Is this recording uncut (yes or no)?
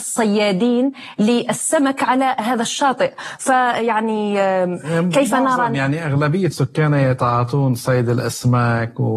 yes